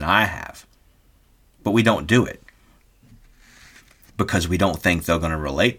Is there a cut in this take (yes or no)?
no